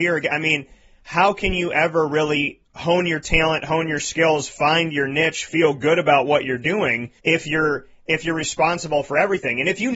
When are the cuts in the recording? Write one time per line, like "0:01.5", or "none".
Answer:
0:02.7
0:07.2